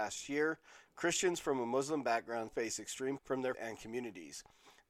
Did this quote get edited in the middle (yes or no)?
yes